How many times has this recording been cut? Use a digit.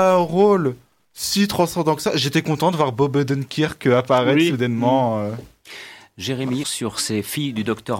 1